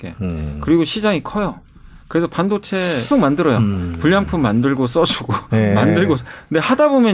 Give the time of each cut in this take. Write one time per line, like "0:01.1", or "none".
0:03.1